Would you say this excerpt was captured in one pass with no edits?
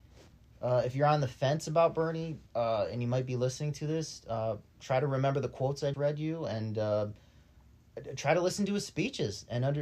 no; 2 cuts; at 2.5 s, 5.9 s

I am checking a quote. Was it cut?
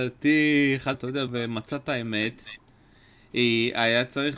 yes; 2 cuts; at 0.9 s, 1.3 s

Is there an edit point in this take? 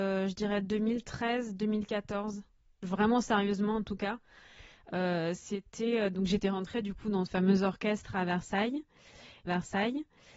yes; 2 cuts; at 7.3 s, 9.5 s

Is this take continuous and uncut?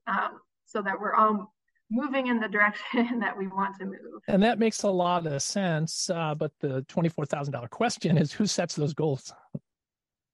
yes; 0 cuts

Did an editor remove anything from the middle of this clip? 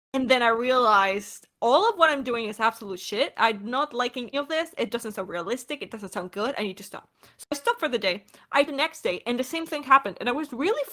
yes; 2 cuts; at 4.3 s, 8.7 s

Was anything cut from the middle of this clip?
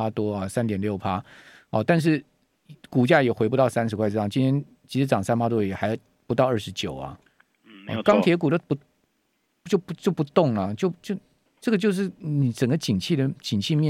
no; 0 cuts

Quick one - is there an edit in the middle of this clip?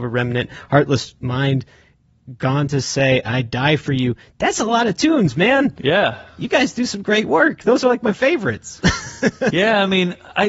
no; 0 cuts

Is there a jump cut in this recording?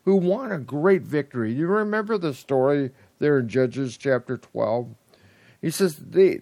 no; 0 cuts

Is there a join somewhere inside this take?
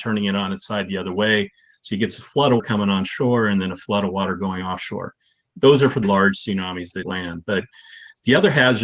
yes; 3 cuts; at 2.6 s, 6.0 s, 7.0 s

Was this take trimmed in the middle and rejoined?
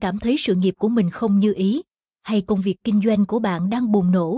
no; 0 cuts

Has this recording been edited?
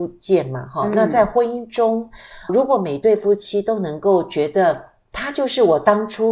yes; 1 cut; at 2.5 s

